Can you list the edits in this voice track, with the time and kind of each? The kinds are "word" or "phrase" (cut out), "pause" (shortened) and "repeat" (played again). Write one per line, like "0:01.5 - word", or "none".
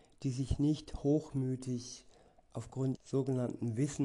0:03.0 - word